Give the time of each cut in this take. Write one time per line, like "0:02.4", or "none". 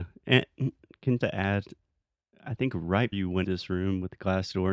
0:01.2
0:03.1
0:03.4